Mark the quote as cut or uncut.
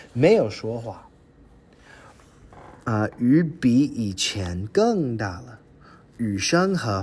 uncut